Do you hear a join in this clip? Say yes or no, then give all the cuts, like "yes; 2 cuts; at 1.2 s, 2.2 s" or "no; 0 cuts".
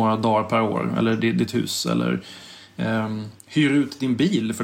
no; 0 cuts